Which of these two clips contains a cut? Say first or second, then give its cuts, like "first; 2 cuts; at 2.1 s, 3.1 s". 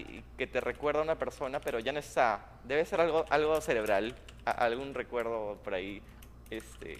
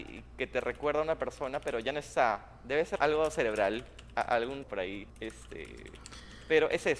second; 3 cuts; at 3.0 s, 4.6 s, 5.1 s